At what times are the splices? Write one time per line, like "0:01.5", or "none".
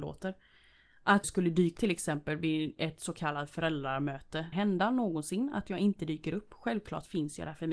0:01.2
0:01.8
0:04.5